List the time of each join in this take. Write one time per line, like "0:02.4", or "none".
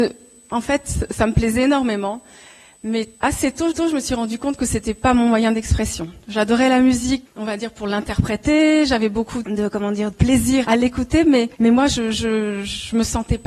0:03.1
0:03.7
0:07.3
0:09.4
0:10.1
0:10.6
0:11.5